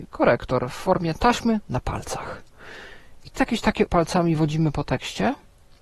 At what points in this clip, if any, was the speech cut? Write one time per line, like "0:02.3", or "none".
0:01.6
0:03.3
0:03.9